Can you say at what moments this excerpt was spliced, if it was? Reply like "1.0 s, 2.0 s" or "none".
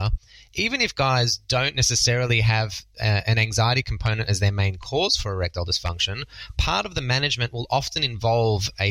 none